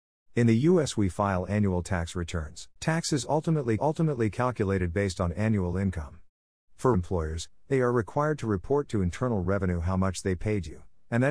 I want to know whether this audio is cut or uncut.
cut